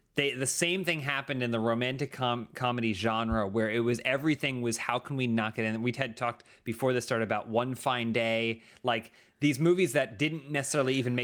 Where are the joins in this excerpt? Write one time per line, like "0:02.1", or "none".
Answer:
none